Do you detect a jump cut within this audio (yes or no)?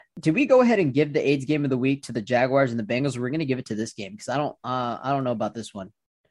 no